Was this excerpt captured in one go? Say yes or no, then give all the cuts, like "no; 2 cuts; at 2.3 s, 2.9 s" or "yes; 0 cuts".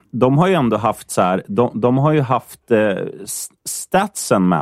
yes; 0 cuts